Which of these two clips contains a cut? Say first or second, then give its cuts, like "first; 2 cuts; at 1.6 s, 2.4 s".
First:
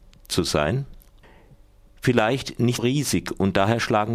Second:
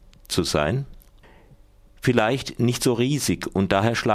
first; 1 cut; at 2.8 s